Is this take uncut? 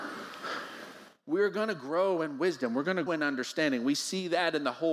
no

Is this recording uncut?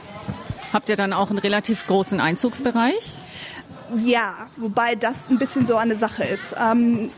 yes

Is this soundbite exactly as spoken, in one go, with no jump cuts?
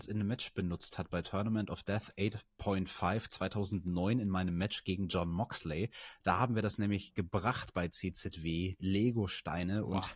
no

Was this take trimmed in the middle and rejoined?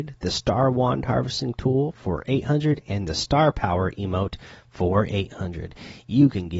no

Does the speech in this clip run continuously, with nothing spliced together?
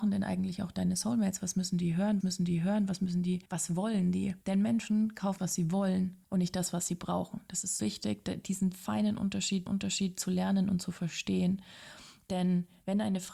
no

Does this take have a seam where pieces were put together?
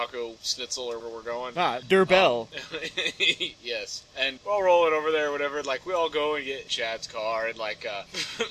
yes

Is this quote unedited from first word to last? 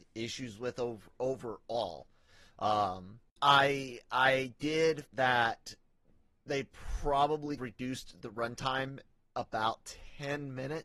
no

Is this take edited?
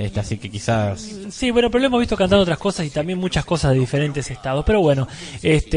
no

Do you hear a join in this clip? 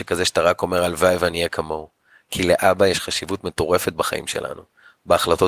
no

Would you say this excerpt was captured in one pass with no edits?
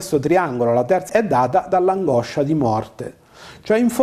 no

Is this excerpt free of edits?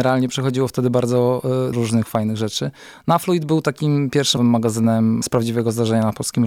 no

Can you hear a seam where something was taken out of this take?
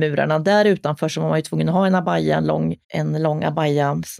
yes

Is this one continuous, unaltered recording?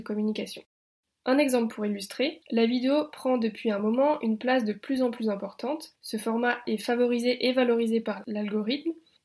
yes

